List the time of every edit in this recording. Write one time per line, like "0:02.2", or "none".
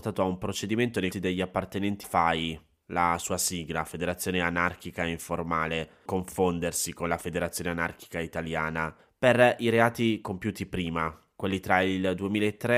0:01.1
0:02.0
0:06.1
0:09.0